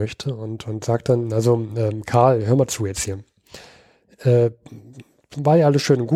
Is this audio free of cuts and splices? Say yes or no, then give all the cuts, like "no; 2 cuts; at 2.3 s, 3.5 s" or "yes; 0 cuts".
yes; 0 cuts